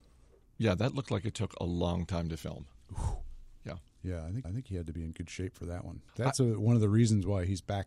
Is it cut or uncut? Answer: cut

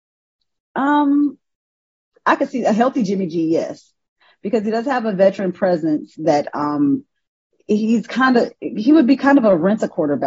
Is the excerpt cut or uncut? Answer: uncut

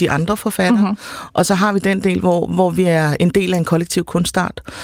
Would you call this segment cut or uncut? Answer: uncut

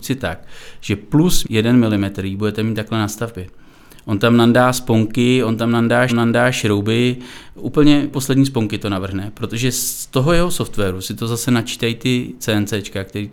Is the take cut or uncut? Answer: cut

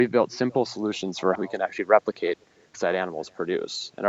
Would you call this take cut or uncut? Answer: cut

